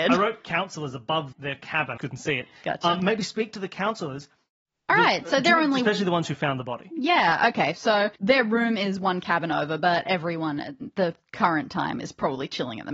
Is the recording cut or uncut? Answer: cut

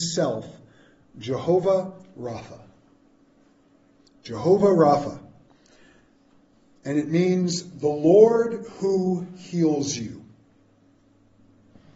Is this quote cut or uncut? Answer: uncut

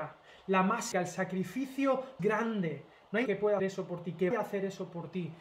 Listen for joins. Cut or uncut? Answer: cut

